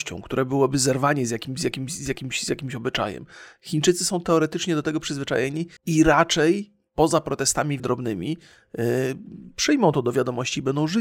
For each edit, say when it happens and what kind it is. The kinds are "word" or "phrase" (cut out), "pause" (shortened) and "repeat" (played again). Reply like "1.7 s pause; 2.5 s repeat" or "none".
5.8 s pause; 7.8 s word